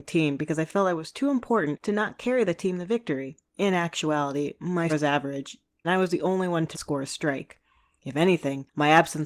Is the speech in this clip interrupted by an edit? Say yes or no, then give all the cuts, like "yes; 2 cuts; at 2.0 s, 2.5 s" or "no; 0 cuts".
yes; 4 cuts; at 3.5 s, 4.9 s, 5.8 s, 6.7 s